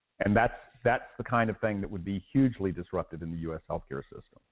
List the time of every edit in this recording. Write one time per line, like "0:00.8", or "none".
none